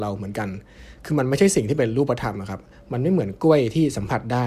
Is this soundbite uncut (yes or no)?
yes